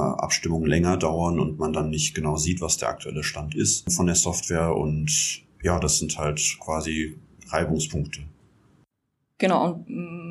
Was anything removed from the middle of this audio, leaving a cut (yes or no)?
no